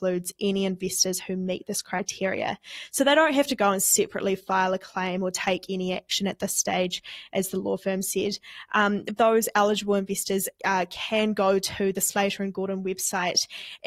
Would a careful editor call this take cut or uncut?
cut